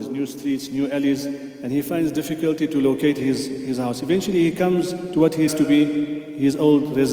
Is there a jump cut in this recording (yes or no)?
yes